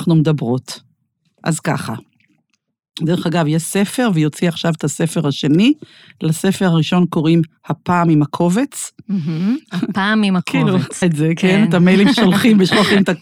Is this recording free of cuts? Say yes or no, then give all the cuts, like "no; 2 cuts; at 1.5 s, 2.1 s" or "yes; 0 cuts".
no; 2 cuts; at 11.0 s, 12.1 s